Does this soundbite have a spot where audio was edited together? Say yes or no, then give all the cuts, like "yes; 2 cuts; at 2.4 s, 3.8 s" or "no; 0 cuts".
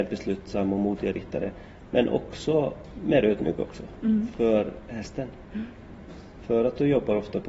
no; 0 cuts